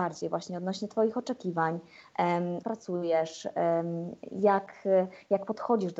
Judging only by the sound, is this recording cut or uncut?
cut